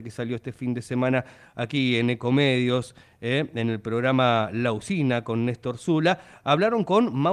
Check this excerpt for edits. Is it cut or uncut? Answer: uncut